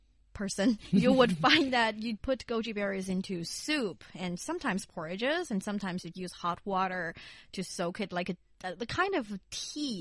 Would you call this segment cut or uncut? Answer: cut